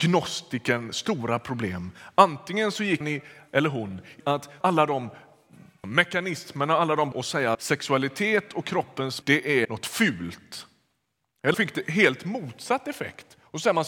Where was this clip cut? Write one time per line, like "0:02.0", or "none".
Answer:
0:03.0
0:04.2
0:04.6
0:05.8
0:07.1
0:07.5
0:09.2
0:09.6
0:11.5